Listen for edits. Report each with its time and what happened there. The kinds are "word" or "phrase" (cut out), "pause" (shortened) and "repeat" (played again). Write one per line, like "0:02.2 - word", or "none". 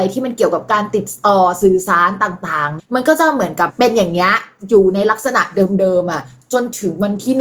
0:02.8 - phrase